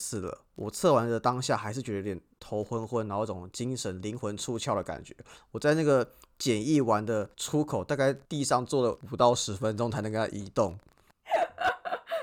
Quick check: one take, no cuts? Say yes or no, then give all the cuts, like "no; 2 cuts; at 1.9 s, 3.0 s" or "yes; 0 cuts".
no; 3 cuts; at 7.3 s, 8.2 s, 9.0 s